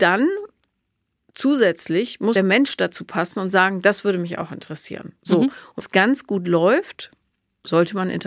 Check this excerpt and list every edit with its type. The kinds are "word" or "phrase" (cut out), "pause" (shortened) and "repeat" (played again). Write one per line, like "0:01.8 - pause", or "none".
0:02.4 - phrase
0:05.8 - word